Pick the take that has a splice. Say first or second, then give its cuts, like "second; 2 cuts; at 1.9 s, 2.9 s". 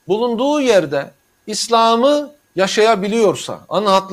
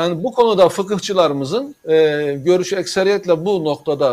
second; 1 cut; at 1.8 s